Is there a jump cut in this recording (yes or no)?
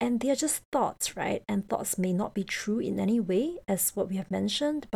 no